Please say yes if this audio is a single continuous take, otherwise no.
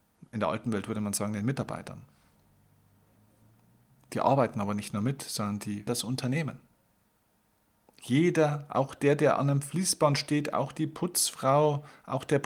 no